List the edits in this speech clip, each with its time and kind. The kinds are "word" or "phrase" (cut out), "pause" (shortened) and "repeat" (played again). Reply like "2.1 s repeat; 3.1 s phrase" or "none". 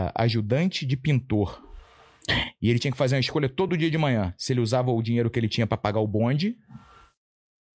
none